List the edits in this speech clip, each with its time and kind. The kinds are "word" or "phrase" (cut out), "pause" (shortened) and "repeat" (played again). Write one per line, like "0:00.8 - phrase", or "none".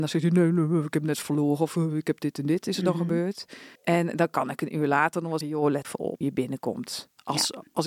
0:03.8 - pause
0:05.4 - word
0:05.8 - phrase
0:06.2 - word